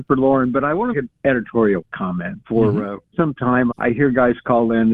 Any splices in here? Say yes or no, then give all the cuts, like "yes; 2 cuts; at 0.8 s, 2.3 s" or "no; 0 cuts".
yes; 3 cuts; at 0.9 s, 3.1 s, 3.7 s